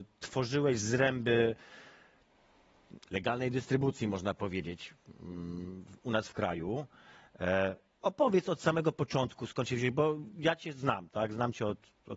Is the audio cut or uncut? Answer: uncut